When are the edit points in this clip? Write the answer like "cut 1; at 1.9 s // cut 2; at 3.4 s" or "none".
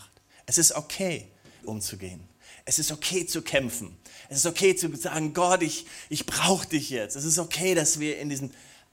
cut 1; at 1.6 s